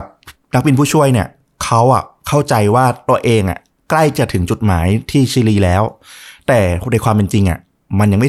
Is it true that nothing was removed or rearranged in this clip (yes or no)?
yes